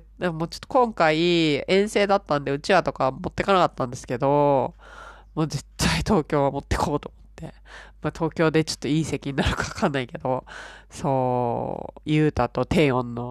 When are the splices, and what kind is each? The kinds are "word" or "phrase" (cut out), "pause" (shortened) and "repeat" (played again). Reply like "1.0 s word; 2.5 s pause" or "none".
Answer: none